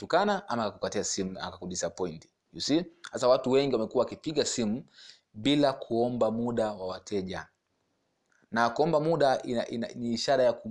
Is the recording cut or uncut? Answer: uncut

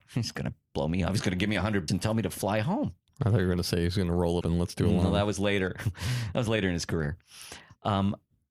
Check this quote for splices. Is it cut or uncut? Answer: cut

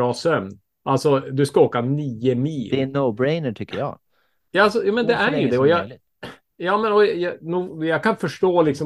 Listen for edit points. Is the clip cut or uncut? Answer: uncut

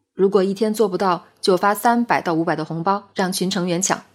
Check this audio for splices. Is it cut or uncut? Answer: cut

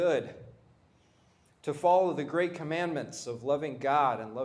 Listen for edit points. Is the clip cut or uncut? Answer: uncut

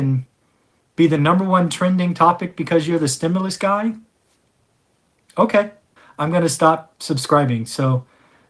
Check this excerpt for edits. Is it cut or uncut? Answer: cut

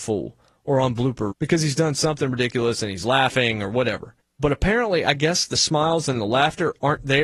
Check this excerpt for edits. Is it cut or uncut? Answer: cut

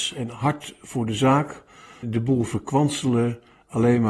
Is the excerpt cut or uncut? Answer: cut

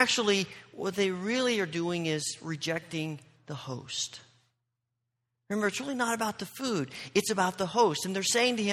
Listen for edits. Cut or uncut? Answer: uncut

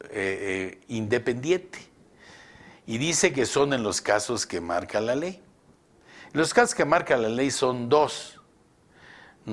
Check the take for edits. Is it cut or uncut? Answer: uncut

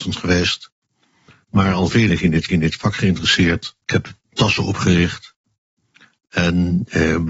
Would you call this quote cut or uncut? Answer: cut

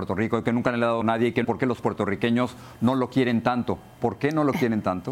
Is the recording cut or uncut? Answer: cut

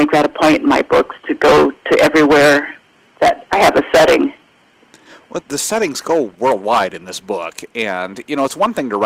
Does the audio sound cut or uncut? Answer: cut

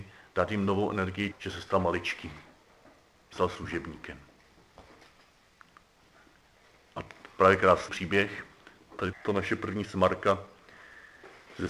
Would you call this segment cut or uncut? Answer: cut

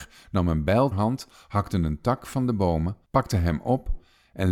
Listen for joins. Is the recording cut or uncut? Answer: cut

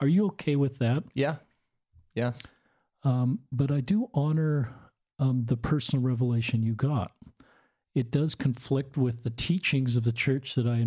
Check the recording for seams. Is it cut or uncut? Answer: uncut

